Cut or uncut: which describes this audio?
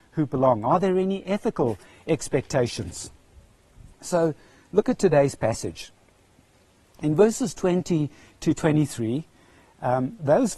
cut